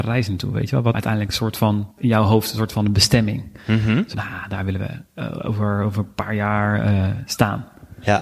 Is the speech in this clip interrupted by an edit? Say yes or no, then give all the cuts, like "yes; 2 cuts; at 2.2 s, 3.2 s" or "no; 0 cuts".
yes; 3 cuts; at 0.9 s, 1.9 s, 4.1 s